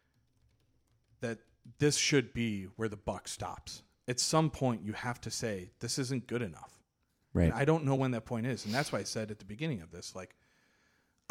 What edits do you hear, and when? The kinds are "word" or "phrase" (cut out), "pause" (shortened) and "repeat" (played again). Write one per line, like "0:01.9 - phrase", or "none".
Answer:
none